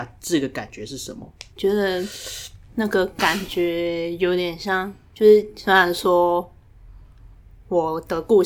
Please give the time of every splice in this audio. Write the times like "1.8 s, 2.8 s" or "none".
1.5 s